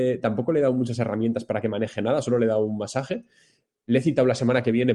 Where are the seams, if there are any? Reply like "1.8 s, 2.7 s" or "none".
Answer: none